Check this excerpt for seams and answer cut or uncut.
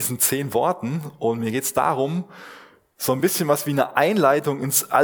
uncut